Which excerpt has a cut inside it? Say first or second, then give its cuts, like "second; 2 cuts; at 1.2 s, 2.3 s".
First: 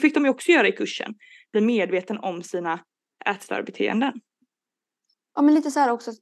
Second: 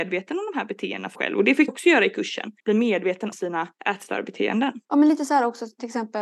second; 6 cuts; at 1.2 s, 1.7 s, 2.6 s, 3.3 s, 3.7 s, 4.8 s